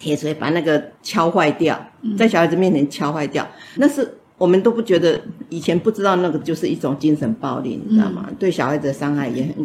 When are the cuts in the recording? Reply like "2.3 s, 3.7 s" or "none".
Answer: 0.9 s, 3.8 s